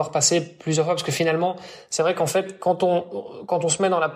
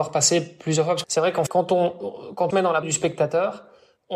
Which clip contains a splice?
second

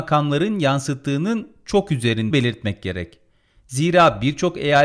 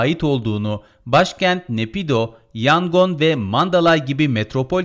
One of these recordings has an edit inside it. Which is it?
first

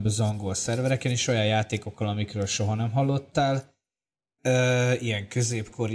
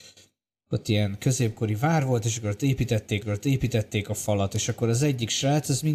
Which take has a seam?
second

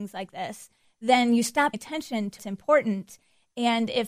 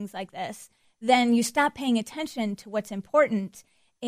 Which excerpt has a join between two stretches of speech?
first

